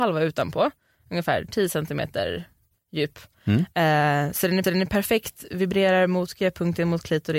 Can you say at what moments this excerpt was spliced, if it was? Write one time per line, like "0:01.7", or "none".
0:04.6